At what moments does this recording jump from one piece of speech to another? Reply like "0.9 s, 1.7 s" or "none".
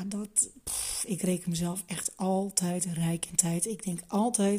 none